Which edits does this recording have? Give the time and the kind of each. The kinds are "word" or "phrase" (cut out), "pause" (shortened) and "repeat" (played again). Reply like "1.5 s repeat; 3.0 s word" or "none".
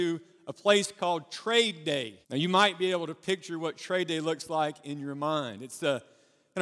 2.2 s pause